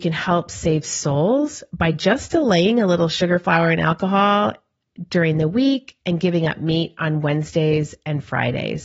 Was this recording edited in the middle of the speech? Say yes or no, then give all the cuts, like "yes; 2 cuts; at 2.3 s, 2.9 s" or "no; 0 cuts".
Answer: no; 0 cuts